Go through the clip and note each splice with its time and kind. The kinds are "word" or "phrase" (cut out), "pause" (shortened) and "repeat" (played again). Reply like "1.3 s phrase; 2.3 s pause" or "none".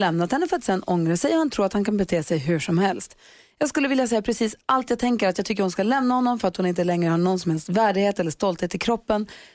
none